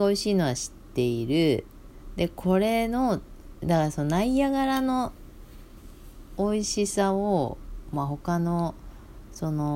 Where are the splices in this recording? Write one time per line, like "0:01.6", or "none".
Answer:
none